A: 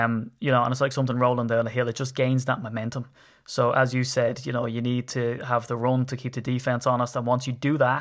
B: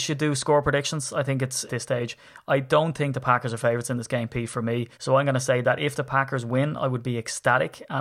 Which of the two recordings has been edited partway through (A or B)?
B